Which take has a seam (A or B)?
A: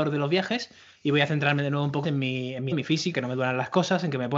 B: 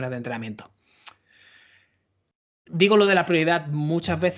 A